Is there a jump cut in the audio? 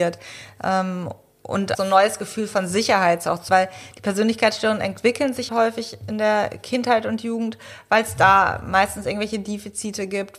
yes; 3 cuts; at 1.7 s, 3.5 s, 5.5 s

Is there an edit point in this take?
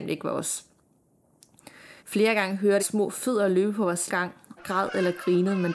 yes; 4 cuts; at 2.0 s, 2.8 s, 4.1 s, 4.6 s

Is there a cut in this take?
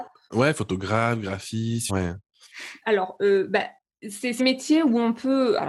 yes; 2 cuts; at 1.9 s, 4.4 s

